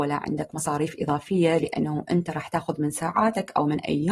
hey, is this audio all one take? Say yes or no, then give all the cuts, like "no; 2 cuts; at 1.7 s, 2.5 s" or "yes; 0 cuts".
yes; 0 cuts